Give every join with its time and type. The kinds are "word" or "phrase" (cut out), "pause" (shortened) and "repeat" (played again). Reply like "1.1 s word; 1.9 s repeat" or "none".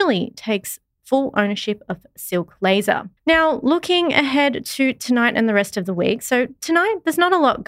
3.2 s pause